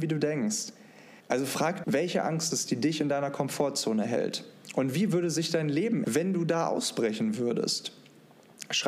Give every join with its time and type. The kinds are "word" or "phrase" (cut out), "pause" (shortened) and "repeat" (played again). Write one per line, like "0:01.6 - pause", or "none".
0:01.2 - pause
0:01.8 - word
0:02.5 - word
0:06.0 - word